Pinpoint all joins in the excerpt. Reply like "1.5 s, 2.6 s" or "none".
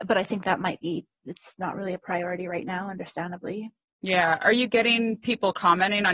none